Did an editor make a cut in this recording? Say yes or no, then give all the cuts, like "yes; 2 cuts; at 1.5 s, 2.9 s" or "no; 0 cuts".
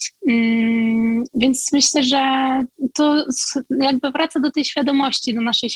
no; 0 cuts